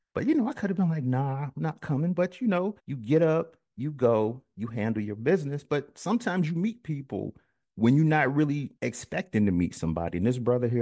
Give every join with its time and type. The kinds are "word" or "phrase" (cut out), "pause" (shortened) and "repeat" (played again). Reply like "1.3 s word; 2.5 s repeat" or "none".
2.8 s pause; 8.8 s pause